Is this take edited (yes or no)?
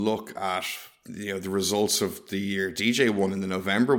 no